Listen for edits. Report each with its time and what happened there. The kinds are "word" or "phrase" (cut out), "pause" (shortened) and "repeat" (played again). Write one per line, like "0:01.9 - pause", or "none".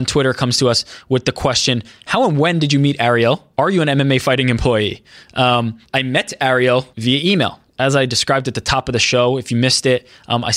0:03.5 - pause
0:05.8 - pause
0:06.9 - pause